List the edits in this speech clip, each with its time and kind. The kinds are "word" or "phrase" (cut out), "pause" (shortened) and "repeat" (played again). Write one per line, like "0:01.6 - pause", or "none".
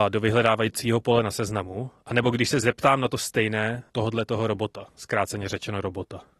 0:03.9 - pause
0:04.9 - pause